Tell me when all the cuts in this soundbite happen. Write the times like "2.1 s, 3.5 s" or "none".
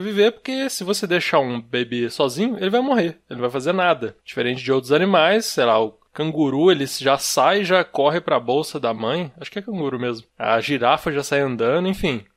4.2 s, 6.1 s, 10.3 s